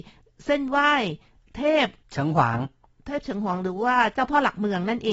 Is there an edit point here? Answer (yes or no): no